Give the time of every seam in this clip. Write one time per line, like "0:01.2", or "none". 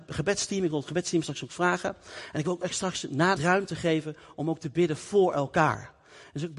0:03.4